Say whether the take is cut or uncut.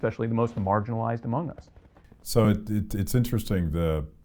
uncut